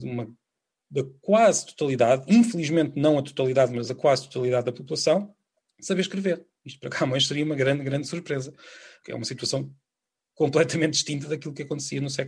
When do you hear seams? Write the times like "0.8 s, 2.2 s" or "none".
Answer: none